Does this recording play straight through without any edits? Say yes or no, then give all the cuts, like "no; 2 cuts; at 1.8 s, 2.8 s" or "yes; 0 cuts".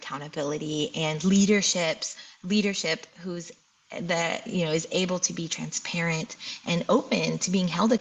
yes; 0 cuts